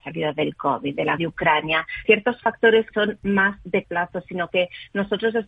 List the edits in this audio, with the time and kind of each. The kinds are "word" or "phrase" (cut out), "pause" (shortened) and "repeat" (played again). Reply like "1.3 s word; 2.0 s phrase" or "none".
1.2 s word; 2.0 s word; 2.9 s word; 3.8 s word

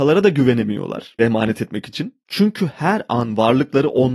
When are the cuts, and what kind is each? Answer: 1.2 s phrase

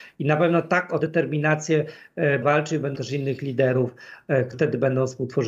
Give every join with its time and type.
1.0 s word; 2.4 s word; 2.9 s word; 4.5 s word

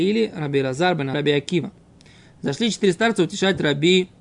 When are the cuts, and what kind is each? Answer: 1.1 s word

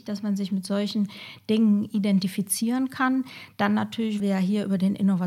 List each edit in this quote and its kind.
4.2 s word

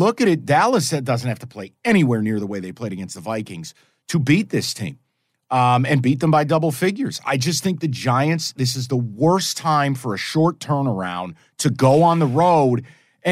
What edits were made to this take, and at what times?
none

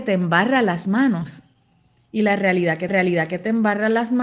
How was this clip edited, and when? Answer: 2.9 s repeat

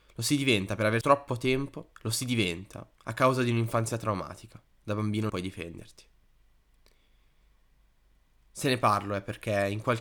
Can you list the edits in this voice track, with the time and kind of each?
1.0 s word; 1.9 s pause; 2.9 s pause; 4.7 s pause; 5.3 s word

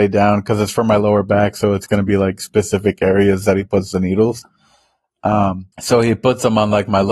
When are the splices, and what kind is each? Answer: 5.7 s pause

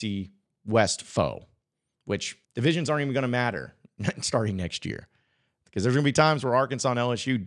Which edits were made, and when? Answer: 2.4 s pause

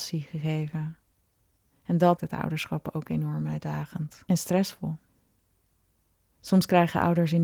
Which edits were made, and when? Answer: 2.2 s word

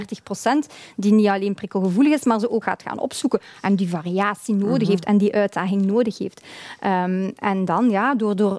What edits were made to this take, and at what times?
2.6 s word

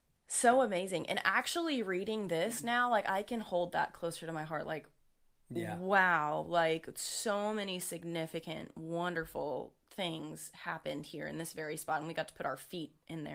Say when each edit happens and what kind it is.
none

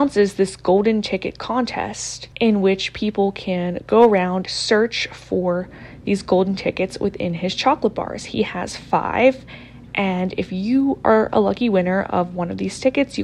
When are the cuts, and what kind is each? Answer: 2.3 s pause; 4.5 s word

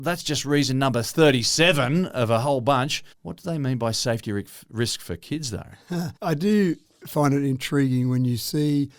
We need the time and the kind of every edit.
3.1 s pause; 6.2 s pause

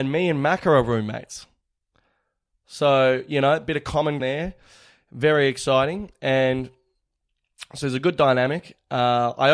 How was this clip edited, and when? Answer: 4.2 s word

